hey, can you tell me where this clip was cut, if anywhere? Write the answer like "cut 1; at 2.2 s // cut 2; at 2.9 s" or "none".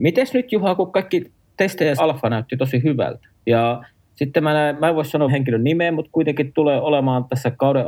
cut 1; at 2.0 s // cut 2; at 4.0 s // cut 3; at 5.3 s

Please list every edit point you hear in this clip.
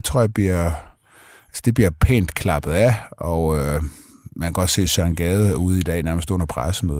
none

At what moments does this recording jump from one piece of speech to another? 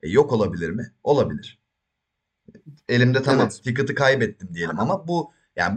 none

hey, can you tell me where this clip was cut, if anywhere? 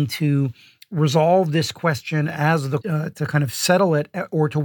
cut 1; at 2.8 s

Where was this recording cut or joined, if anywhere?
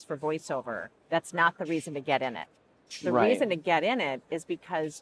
cut 1; at 1.0 s

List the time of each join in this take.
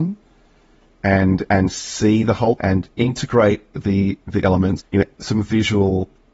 cut 1; at 2.6 s // cut 2; at 3.7 s // cut 3; at 4.4 s // cut 4; at 4.8 s // cut 5; at 5.1 s

